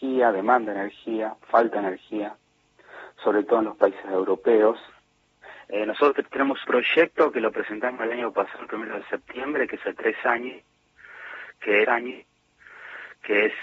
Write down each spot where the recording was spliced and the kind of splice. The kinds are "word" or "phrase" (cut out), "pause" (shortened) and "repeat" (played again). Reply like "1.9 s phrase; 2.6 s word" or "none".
6.6 s word; 9.8 s phrase; 11.8 s repeat